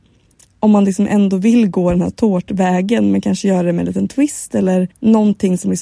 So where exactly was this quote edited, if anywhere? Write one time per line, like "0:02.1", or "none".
0:04.9

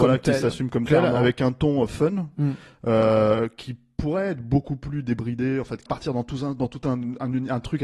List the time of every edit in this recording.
0:05.9

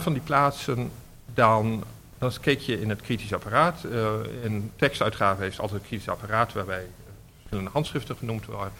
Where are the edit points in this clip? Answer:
none

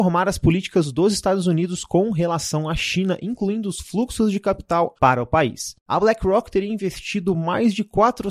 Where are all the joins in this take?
0:05.0

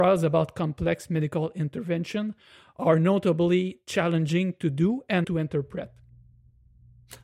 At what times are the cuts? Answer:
0:05.2

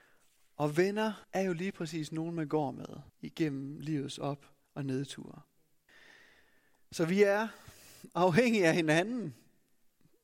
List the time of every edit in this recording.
0:01.2
0:03.1
0:04.6
0:05.9

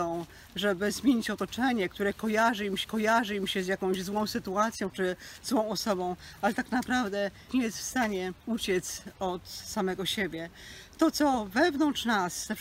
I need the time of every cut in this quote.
0:02.8
0:07.5
0:08.4

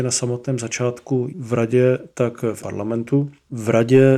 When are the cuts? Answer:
0:01.3
0:02.6

